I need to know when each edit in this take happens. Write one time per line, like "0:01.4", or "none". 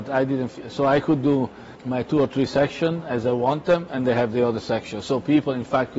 0:04.0